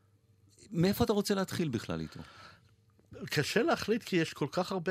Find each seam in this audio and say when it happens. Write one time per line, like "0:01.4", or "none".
none